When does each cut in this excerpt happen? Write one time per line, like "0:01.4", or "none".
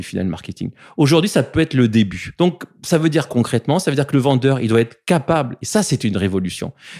0:03.3